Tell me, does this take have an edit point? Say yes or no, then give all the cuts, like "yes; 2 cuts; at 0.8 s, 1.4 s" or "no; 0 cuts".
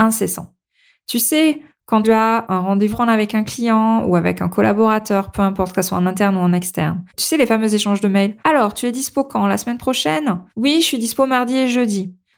yes; 5 cuts; at 2.0 s, 2.9 s, 7.1 s, 8.4 s, 10.5 s